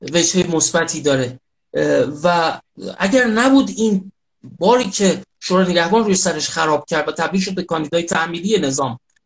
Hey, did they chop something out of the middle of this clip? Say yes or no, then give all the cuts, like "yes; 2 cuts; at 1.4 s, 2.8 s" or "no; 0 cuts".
no; 0 cuts